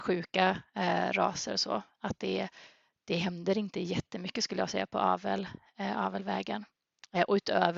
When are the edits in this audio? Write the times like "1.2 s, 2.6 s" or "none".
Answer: none